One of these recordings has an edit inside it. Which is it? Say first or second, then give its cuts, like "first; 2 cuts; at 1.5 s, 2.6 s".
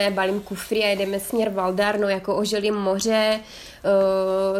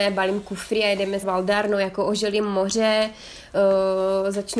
second; 1 cut; at 1.2 s